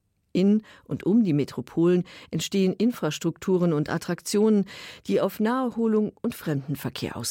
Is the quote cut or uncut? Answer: uncut